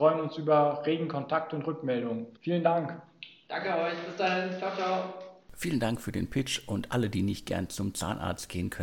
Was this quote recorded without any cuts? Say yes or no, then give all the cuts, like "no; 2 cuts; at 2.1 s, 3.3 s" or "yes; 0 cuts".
no; 1 cut; at 2.4 s